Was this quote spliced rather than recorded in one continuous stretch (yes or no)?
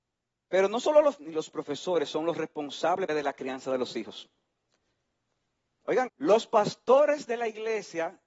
yes